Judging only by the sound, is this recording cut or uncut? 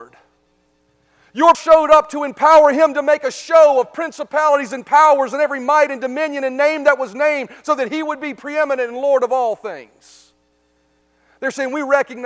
cut